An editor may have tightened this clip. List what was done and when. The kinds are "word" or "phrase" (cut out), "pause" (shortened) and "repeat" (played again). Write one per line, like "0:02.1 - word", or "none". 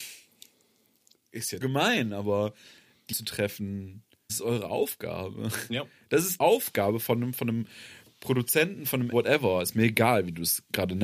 0:01.6 - word
0:03.1 - word
0:04.3 - word
0:06.4 - word
0:09.1 - word